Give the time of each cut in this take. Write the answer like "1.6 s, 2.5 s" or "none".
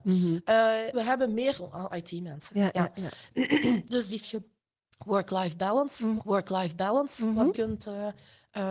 0.9 s, 1.5 s, 1.9 s, 4.2 s, 6.2 s, 7.5 s